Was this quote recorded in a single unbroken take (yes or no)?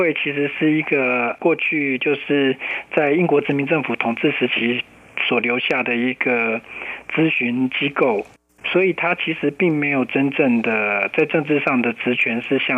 yes